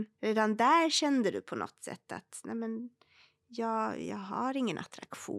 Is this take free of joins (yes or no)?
yes